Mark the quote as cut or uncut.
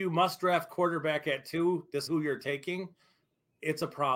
cut